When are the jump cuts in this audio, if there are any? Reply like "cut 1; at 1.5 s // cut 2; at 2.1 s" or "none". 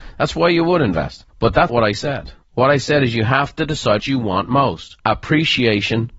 cut 1; at 1.3 s // cut 2; at 1.7 s // cut 3; at 2.4 s // cut 4; at 4.0 s // cut 5; at 5.0 s